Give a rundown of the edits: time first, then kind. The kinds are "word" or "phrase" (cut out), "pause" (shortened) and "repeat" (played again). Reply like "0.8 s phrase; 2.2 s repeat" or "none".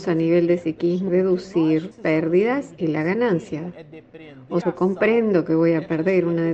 1.1 s word; 1.9 s word; 4.6 s word